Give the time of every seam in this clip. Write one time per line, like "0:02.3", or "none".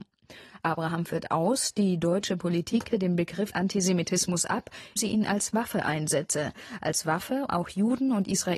0:02.9
0:03.5
0:05.0
0:07.5